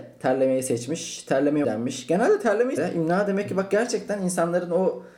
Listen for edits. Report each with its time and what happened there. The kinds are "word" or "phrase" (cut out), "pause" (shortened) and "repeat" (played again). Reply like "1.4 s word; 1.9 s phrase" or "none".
1.6 s word; 2.8 s word